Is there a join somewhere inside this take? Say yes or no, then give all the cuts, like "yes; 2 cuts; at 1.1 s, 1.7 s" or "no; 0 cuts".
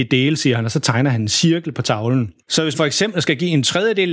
yes; 2 cuts; at 2.4 s, 2.7 s